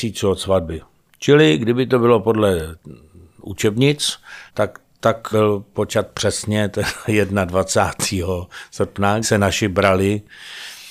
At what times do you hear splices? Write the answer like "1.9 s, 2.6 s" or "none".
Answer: 4.5 s, 5.3 s, 9.2 s